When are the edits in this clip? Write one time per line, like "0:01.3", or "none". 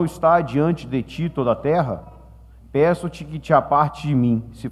none